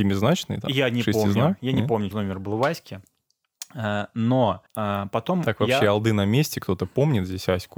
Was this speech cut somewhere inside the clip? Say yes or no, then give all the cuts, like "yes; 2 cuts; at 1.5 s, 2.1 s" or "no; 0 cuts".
yes; 2 cuts; at 2.1 s, 4.7 s